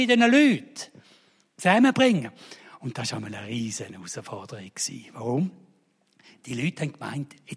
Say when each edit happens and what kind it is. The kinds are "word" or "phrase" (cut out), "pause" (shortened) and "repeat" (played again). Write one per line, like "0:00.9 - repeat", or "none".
none